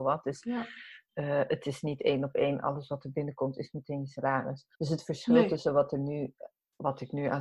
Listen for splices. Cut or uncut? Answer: cut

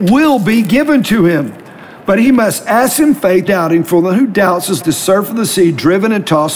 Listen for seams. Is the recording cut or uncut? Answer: cut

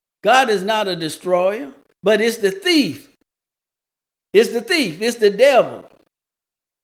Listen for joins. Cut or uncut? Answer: uncut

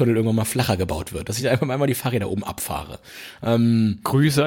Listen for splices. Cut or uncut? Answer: uncut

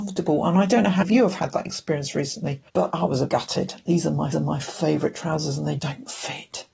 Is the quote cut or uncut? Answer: cut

